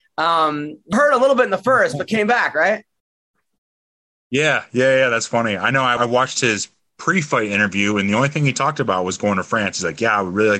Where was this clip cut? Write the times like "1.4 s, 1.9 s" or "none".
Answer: 0.9 s, 6.0 s